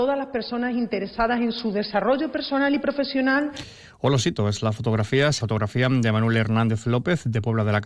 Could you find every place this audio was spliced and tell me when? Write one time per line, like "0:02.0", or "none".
0:05.4